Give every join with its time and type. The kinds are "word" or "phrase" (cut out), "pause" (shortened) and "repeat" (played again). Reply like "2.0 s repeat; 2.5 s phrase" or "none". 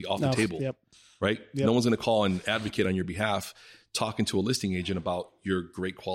none